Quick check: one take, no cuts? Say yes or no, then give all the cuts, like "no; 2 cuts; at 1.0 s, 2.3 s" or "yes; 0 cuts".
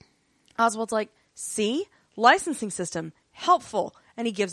yes; 0 cuts